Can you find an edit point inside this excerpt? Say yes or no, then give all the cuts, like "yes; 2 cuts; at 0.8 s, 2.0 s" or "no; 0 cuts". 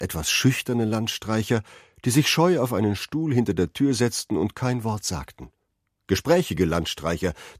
no; 0 cuts